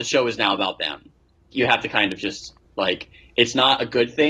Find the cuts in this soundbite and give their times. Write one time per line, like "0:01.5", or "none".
0:01.5
0:02.6